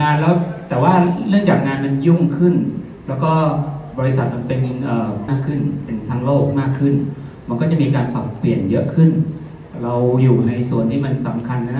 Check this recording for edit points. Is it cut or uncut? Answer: cut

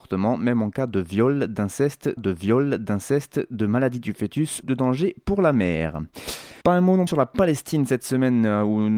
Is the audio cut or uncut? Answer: cut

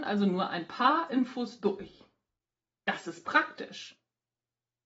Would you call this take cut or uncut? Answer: uncut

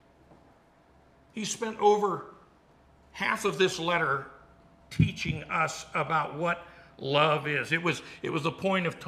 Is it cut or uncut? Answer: uncut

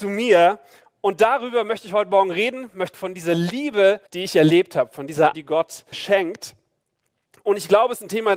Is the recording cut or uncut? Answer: cut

